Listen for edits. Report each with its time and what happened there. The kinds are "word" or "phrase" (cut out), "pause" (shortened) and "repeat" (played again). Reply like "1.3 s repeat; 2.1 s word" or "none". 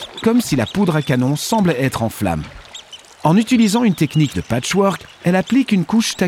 4.3 s phrase